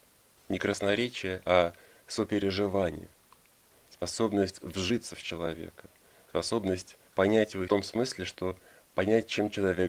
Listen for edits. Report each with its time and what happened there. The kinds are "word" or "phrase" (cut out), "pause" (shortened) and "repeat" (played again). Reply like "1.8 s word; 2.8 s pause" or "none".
7.1 s pause; 7.7 s phrase